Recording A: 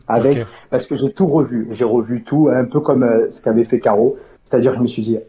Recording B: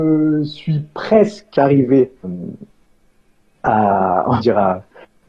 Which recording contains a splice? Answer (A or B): B